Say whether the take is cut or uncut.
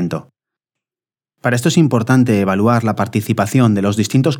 uncut